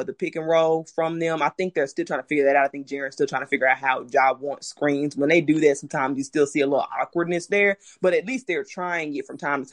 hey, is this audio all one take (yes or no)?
yes